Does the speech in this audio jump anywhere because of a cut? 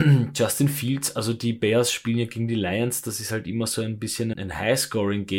yes; 1 cut; at 4.3 s

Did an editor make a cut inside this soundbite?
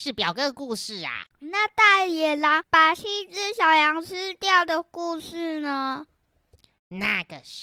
no; 0 cuts

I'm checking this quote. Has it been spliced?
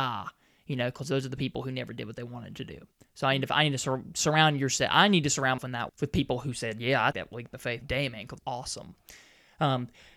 yes; 5 cuts; at 5.6 s, 5.9 s, 7.1 s, 7.8 s, 8.4 s

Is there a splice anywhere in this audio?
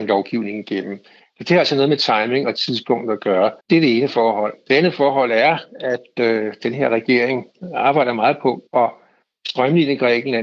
yes; 2 cuts; at 3.6 s, 8.7 s

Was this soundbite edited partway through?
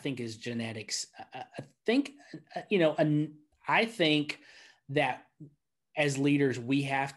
no; 0 cuts

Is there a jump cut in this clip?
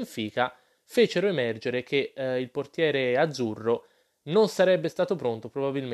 no; 0 cuts

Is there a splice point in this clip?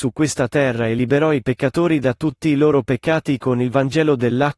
no; 0 cuts

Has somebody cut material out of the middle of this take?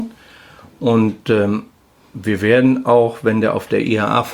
no; 0 cuts

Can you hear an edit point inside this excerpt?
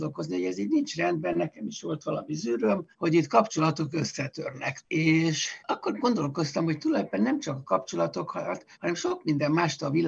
yes; 3 cuts; at 2.9 s, 5.6 s, 8.7 s

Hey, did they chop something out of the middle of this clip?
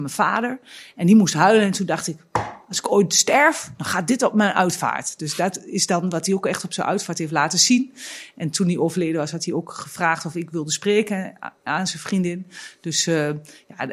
no; 0 cuts

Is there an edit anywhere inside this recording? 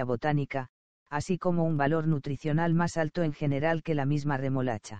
no; 0 cuts

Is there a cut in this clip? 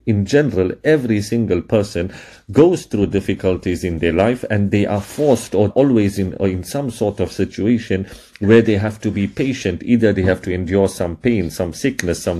yes; 1 cut; at 5.7 s

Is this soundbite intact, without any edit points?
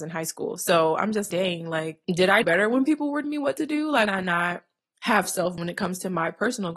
no; 7 cuts; at 1.3 s, 2.0 s, 2.4 s, 3.2 s, 4.1 s, 4.8 s, 5.6 s

